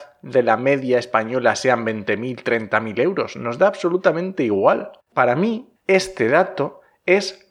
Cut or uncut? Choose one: cut